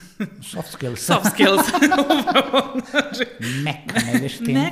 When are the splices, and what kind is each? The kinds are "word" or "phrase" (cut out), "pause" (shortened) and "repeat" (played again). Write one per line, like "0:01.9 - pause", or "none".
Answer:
none